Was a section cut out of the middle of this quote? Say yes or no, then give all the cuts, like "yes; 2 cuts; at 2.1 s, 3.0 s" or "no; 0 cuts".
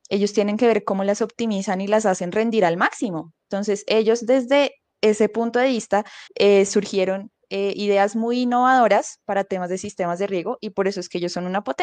yes; 1 cut; at 6.3 s